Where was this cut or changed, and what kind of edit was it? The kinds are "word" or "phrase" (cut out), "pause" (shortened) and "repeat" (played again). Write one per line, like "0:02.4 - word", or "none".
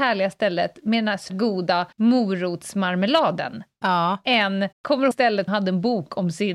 0:01.3 - word
0:01.9 - pause
0:04.7 - pause
0:05.1 - word
0:05.5 - word